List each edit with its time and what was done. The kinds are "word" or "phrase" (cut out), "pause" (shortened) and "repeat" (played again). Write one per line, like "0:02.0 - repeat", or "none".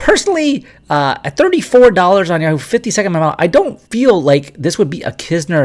0:03.9 - pause